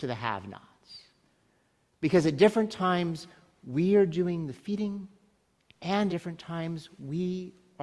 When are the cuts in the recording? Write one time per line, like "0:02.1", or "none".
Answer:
0:06.1